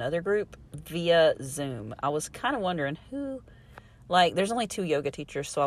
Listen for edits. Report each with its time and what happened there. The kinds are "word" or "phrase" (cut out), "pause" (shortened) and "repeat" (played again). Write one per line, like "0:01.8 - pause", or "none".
none

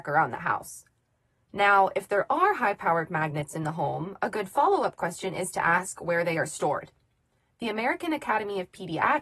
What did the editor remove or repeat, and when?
none

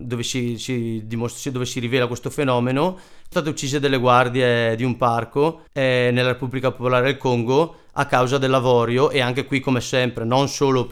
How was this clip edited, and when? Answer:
0:03.3 - word
0:05.7 - pause

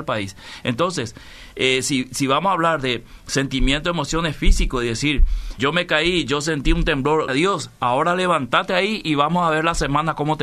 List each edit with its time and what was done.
0:05.6 - word
0:07.3 - word

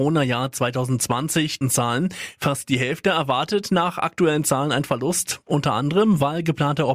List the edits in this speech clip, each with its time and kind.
0:01.6 - phrase

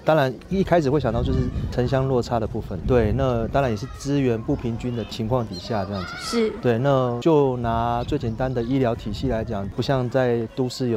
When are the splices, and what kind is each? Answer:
0:02.8 - word

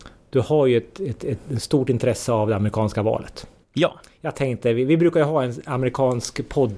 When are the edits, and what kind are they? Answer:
0:03.6 - pause

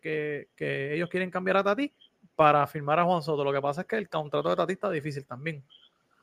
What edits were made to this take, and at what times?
0:02.1 - pause

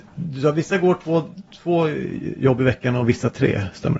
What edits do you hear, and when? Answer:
none

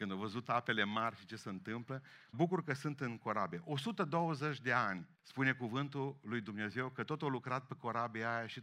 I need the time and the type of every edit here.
0:02.3 - word
0:05.1 - pause

